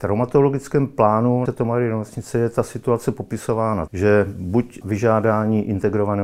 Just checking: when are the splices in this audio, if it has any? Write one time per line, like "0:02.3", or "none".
0:01.4
0:03.9
0:04.8